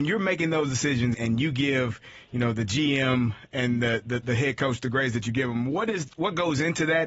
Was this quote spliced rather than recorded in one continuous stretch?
yes; 1 cut; at 1.1 s

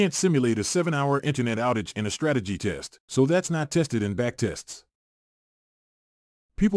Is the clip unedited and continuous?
yes; 0 cuts

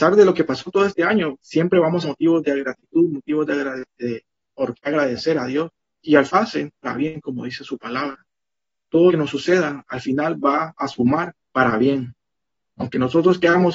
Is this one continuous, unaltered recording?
no; 7 cuts; at 1.4 s, 2.0 s, 5.8 s, 6.3 s, 6.8 s, 9.1 s, 11.4 s

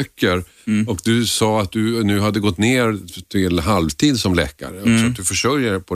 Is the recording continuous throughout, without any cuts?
yes; 0 cuts

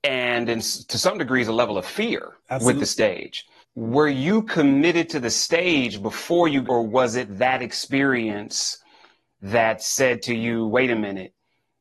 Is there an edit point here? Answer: yes; 3 cuts; at 2.4 s, 3.6 s, 6.6 s

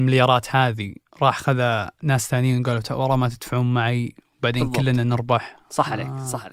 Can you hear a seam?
no; 0 cuts

